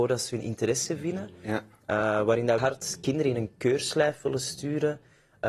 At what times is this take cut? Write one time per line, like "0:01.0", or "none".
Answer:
0:02.6